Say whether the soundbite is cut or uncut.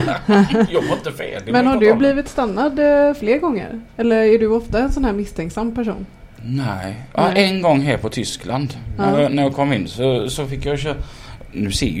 cut